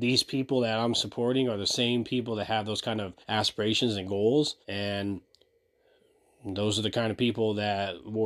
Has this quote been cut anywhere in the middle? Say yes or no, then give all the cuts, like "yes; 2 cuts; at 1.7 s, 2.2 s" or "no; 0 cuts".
yes; 2 cuts; at 3.2 s, 4.6 s